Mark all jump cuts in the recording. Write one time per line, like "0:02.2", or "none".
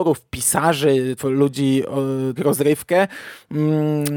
0:01.2
0:02.4